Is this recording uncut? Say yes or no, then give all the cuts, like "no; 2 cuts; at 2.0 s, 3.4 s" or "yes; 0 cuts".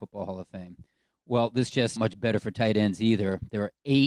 no; 1 cut; at 2.0 s